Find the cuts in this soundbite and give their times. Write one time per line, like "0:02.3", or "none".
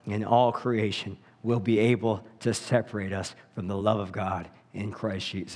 none